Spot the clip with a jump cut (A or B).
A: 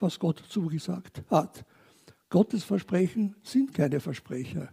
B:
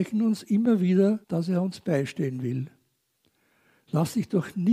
B